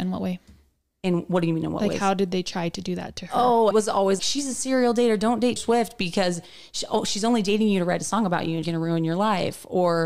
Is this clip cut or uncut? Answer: cut